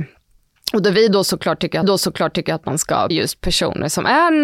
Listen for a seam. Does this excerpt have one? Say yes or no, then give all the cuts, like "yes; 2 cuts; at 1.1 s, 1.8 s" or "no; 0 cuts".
yes; 2 cuts; at 1.8 s, 3.1 s